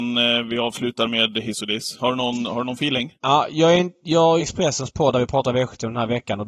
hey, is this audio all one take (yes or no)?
no